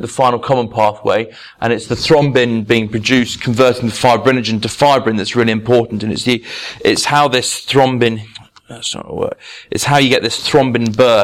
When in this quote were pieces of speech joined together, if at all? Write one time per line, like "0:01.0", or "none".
none